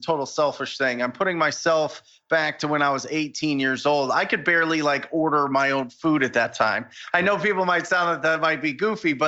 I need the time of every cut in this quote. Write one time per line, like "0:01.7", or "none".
none